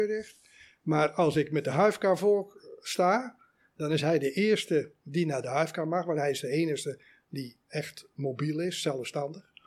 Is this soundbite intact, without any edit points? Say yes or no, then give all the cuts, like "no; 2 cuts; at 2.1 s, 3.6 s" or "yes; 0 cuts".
yes; 0 cuts